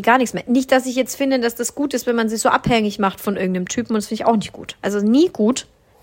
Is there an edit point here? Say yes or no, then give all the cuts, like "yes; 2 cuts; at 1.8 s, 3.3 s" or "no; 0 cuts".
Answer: no; 0 cuts